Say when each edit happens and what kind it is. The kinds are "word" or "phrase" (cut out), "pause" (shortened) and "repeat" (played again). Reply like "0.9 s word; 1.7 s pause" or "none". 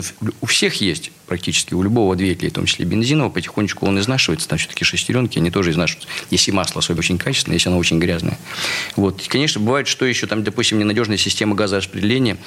7.0 s word